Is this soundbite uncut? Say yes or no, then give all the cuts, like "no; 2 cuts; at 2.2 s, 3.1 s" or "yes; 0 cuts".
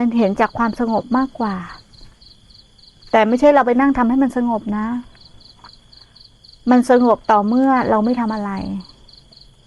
yes; 0 cuts